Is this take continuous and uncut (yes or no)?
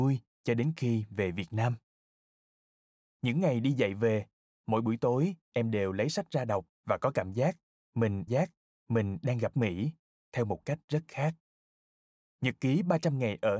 no